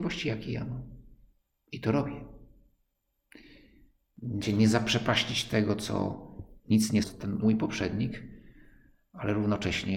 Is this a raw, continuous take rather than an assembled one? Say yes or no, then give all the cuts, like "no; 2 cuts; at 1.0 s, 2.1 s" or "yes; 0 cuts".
no; 4 cuts; at 4.4 s, 6.6 s, 7.0 s, 7.4 s